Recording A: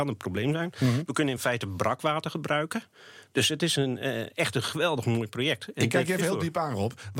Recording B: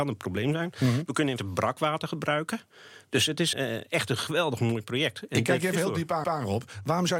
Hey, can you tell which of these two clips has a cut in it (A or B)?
B